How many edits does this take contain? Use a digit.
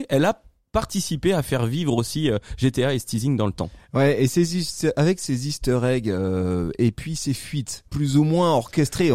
1